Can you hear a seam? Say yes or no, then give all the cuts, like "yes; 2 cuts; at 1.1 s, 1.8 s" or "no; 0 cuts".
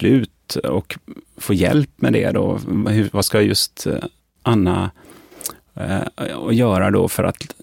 no; 0 cuts